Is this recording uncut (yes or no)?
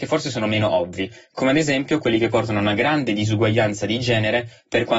yes